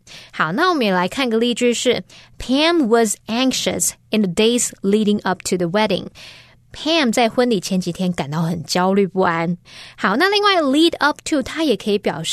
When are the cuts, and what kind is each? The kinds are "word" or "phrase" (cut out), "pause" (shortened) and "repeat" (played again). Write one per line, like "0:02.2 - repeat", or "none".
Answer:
none